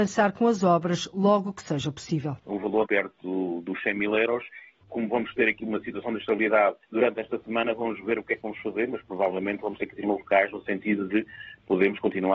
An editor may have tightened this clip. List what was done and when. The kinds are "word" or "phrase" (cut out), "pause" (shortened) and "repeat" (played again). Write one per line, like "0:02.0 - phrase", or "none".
0:02.4 - pause
0:02.8 - word
0:06.8 - pause
0:10.0 - word